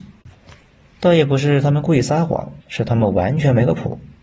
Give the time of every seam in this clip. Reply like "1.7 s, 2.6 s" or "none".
2.6 s